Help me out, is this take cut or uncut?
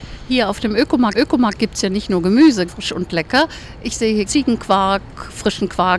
cut